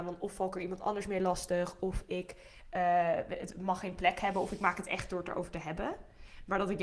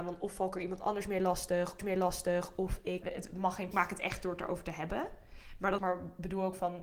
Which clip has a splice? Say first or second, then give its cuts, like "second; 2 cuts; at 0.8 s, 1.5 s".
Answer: second; 4 cuts; at 1.8 s, 3.0 s, 3.7 s, 5.8 s